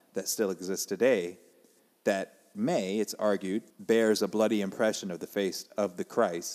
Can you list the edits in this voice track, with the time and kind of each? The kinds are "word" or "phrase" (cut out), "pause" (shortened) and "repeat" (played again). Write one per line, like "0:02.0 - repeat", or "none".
0:03.7 - pause